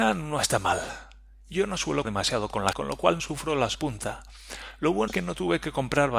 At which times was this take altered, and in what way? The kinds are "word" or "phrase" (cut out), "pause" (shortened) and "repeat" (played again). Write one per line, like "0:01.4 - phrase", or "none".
0:02.0 - word
0:02.7 - word
0:03.2 - word
0:03.7 - word
0:05.1 - word